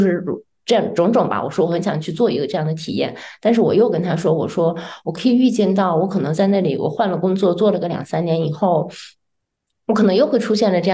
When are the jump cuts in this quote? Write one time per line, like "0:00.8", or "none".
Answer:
none